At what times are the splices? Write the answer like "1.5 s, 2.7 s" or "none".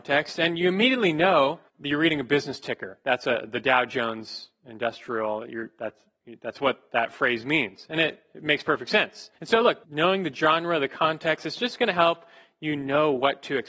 1.7 s, 9.4 s, 9.8 s